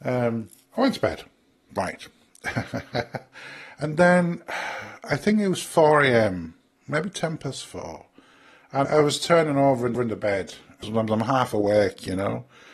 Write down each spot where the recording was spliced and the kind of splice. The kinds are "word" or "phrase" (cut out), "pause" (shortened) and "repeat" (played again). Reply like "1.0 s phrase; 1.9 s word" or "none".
8.8 s word; 9.9 s repeat; 10.8 s phrase